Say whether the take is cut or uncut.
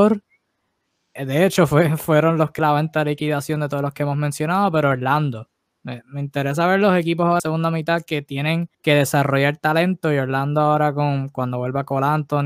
cut